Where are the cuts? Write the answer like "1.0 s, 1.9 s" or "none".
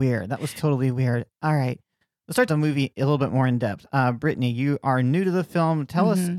2.5 s